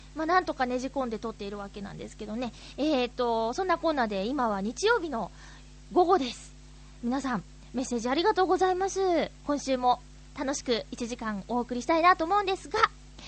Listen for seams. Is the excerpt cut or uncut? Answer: uncut